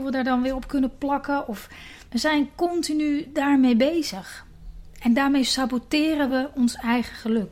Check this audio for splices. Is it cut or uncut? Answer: uncut